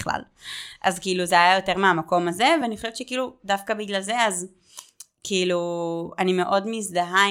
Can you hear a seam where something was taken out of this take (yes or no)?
no